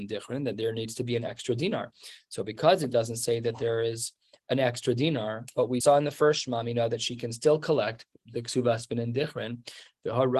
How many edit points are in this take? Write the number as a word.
one